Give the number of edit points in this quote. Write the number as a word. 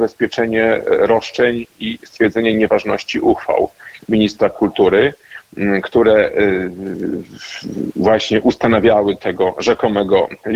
zero